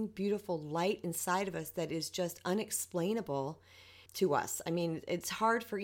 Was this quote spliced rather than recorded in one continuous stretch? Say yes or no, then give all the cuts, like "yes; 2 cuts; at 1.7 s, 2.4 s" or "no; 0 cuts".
yes; 1 cut; at 4.1 s